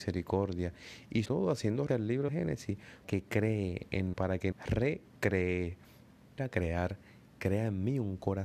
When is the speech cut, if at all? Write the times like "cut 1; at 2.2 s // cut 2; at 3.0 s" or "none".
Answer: cut 1; at 1.2 s // cut 2; at 1.9 s // cut 3; at 2.3 s // cut 4; at 3.0 s // cut 5; at 4.1 s // cut 6; at 4.5 s // cut 7; at 6.4 s